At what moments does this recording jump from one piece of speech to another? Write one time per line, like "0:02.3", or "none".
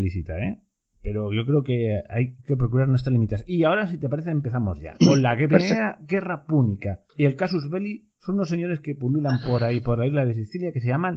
0:07.1
0:08.1